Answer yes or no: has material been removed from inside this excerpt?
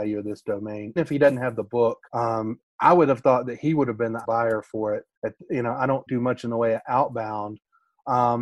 yes